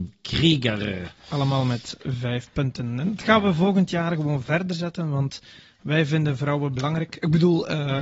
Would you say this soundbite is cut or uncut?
uncut